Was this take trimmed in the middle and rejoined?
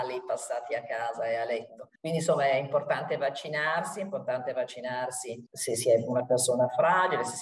yes; 2 cuts; at 2.0 s, 5.5 s

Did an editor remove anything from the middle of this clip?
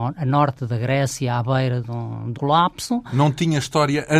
yes; 1 cut; at 2.3 s

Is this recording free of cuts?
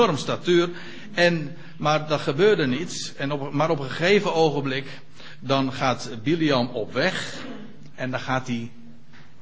yes; 0 cuts

